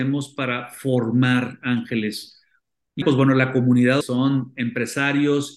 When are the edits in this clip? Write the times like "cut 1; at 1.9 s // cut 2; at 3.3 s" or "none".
cut 1; at 3.0 s // cut 2; at 4.0 s

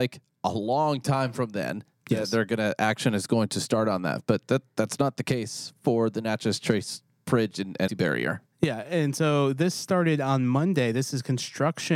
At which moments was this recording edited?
cut 1; at 7.9 s

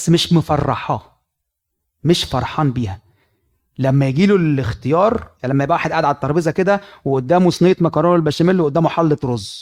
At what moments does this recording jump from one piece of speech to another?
none

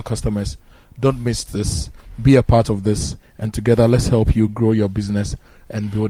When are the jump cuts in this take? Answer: none

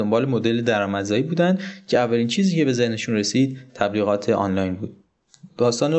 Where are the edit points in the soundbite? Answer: none

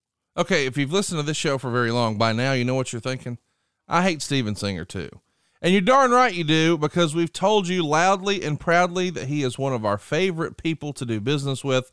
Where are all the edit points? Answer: none

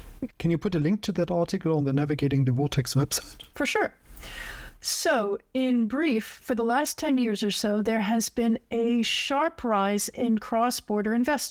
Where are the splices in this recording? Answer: none

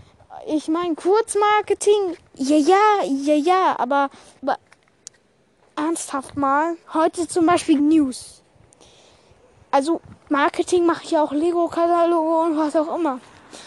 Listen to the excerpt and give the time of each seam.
cut 1; at 4.4 s // cut 2; at 6.8 s // cut 3; at 7.8 s

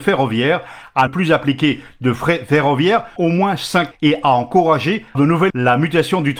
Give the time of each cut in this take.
cut 1; at 1.1 s // cut 2; at 3.2 s // cut 3; at 3.9 s // cut 4; at 5.1 s // cut 5; at 5.5 s

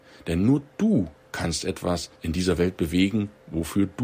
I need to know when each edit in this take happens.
cut 1; at 2.1 s

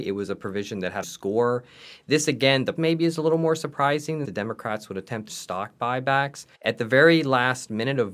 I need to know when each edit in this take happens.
cut 1; at 1.0 s // cut 2; at 2.8 s // cut 3; at 4.2 s // cut 4; at 5.3 s // cut 5; at 6.5 s

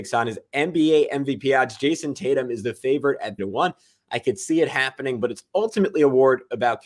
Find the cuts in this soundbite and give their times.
cut 1; at 3.4 s

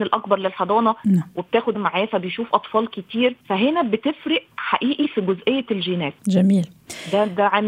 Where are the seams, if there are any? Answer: cut 1; at 1.7 s // cut 2; at 3.4 s // cut 3; at 6.2 s

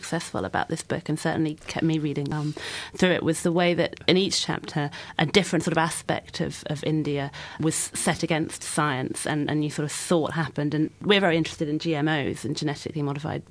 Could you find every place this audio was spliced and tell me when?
cut 1; at 9.5 s

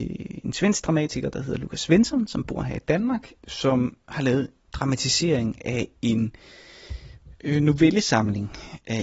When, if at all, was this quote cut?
cut 1; at 3.4 s // cut 2; at 4.6 s

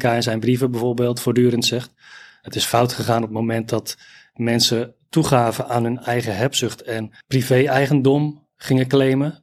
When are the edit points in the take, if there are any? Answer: none

